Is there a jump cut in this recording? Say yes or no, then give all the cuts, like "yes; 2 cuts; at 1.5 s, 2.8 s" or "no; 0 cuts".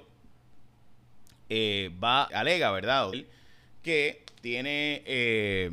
yes; 2 cuts; at 2.3 s, 3.1 s